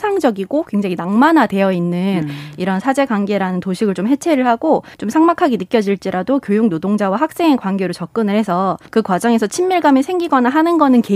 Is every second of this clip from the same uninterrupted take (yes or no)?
no